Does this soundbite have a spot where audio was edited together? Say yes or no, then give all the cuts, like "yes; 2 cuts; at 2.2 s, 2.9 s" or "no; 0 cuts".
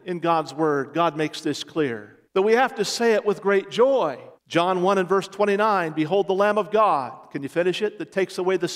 yes; 2 cuts; at 2.3 s, 4.4 s